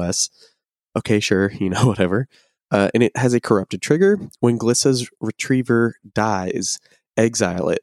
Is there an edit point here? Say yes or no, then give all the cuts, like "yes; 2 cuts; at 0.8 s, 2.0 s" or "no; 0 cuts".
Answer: no; 0 cuts